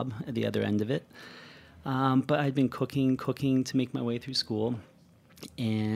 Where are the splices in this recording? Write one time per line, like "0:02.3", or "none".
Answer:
0:03.2